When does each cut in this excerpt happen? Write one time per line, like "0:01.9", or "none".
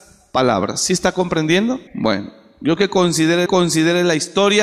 0:01.9
0:02.8
0:03.5